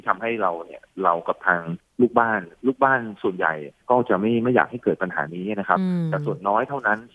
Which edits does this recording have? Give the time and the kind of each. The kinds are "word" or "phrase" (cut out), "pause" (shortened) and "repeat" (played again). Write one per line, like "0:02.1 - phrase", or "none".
0:03.8 - pause